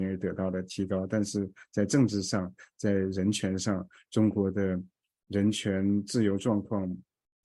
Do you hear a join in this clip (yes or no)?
no